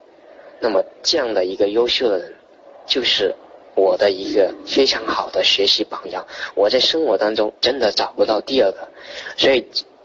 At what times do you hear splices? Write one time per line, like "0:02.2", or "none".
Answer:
0:00.9
0:03.6
0:07.6